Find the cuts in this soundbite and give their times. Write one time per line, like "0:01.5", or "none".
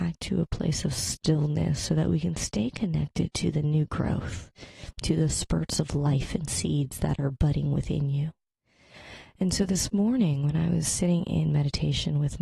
none